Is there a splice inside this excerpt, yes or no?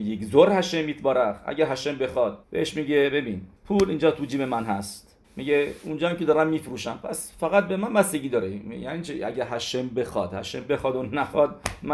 yes